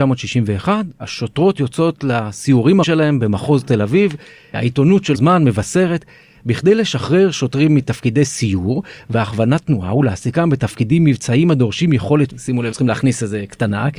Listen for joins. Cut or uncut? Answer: cut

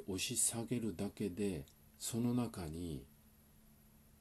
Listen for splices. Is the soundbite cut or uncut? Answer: uncut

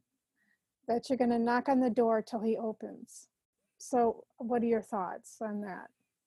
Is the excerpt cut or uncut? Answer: cut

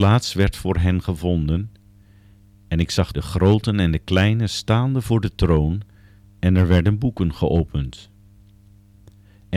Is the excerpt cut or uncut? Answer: cut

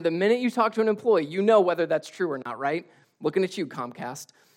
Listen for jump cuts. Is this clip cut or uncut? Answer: uncut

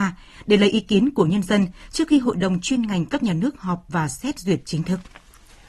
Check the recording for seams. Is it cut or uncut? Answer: uncut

